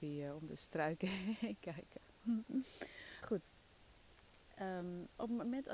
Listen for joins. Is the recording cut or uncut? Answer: cut